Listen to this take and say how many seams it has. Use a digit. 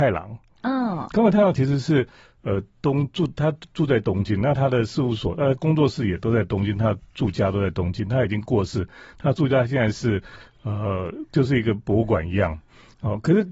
0